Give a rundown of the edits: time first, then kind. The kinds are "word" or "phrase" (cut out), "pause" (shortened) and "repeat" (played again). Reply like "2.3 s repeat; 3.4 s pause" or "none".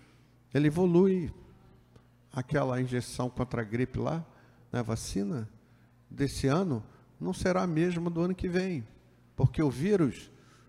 none